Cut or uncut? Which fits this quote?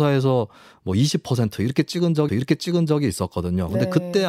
cut